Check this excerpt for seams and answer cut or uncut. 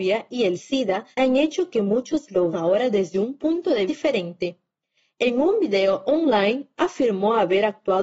cut